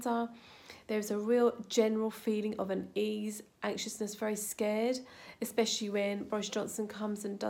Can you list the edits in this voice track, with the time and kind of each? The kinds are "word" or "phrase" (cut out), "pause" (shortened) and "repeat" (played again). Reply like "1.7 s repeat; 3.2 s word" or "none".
none